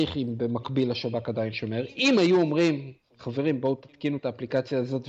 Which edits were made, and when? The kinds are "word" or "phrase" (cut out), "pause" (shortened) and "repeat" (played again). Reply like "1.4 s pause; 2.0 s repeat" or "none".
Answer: none